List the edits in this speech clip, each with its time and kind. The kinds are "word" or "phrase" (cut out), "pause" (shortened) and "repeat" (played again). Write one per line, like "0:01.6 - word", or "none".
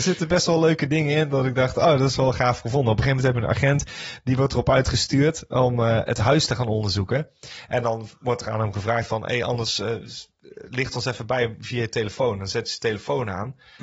none